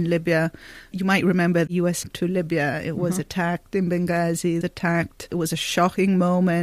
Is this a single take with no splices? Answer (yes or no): no